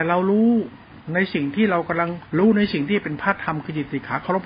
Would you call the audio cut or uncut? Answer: cut